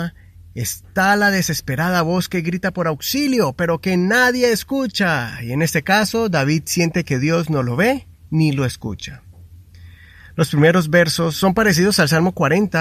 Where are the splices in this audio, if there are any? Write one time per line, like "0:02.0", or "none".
none

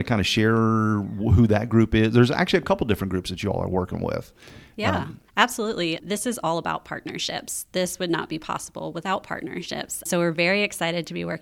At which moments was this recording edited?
0:05.3

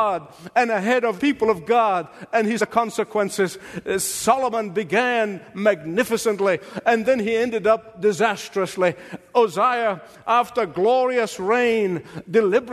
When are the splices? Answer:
0:01.2
0:02.6

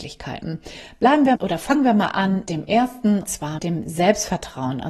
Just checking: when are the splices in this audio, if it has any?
0:01.3
0:02.5
0:03.2
0:03.6

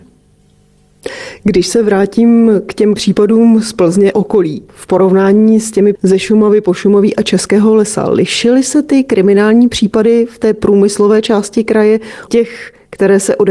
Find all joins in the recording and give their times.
0:03.0
0:04.1
0:04.7
0:05.9
0:12.3

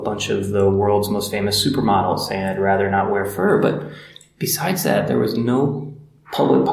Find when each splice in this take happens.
none

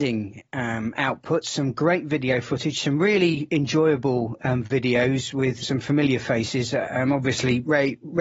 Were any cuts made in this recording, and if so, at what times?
0:05.6

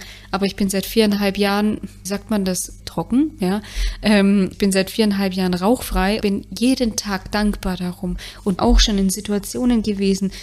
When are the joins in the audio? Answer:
0:02.1
0:02.8
0:04.5
0:06.2
0:08.6

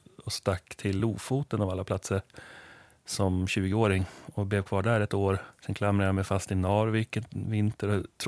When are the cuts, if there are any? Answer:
none

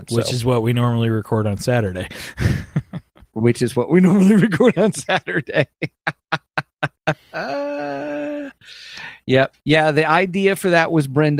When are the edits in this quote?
0:09.6

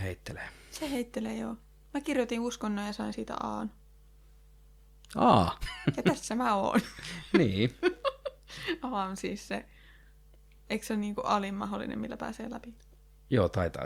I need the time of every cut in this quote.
none

